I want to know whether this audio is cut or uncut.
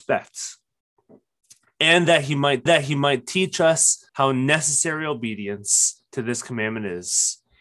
cut